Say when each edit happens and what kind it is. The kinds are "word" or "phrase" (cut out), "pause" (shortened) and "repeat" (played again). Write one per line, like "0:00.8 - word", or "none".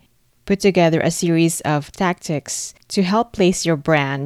none

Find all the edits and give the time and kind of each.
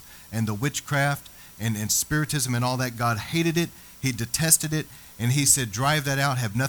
none

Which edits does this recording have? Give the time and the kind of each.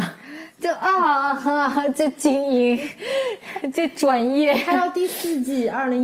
none

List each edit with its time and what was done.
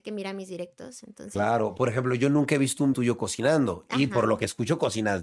0:02.9 - word

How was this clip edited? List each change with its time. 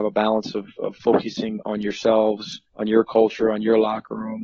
0:01.6 - word
0:02.7 - pause

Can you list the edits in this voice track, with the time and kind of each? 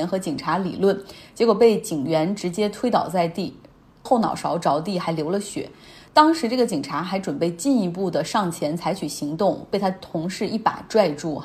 none

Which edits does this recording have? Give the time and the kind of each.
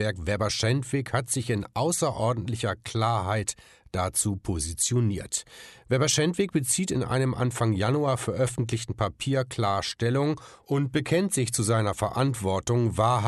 none

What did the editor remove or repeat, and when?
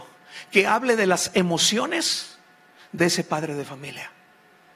none

